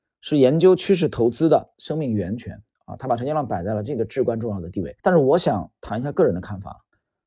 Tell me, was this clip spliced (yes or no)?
yes